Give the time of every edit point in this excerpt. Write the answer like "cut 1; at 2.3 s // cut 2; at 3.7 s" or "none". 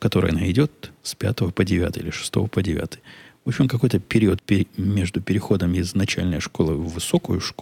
cut 1; at 4.4 s